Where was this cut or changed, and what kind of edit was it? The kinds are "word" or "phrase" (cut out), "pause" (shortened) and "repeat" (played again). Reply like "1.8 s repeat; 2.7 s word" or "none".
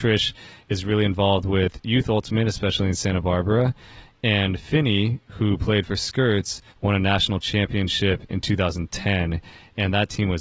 6.7 s pause